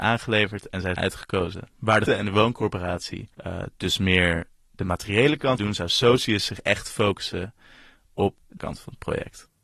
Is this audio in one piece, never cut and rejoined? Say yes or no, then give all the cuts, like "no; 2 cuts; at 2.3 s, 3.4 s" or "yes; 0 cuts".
no; 6 cuts; at 1.0 s, 1.7 s, 2.1 s, 3.3 s, 5.6 s, 8.6 s